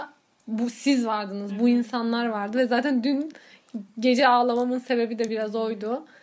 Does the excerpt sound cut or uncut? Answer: uncut